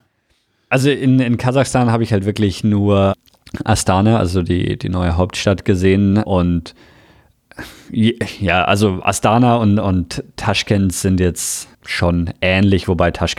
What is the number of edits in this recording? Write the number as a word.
one